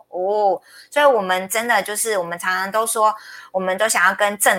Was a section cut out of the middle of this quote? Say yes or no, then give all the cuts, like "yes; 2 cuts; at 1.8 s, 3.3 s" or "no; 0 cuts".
no; 0 cuts